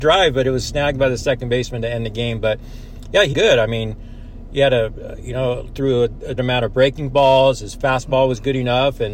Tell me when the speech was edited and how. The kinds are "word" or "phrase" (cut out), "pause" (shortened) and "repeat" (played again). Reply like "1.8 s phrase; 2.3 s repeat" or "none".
3.3 s word; 6.4 s word